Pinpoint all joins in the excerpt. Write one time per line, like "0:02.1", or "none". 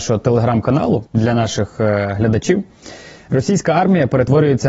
0:01.1